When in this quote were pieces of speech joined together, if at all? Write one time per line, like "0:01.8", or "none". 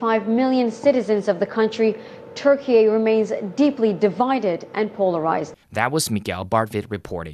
0:05.6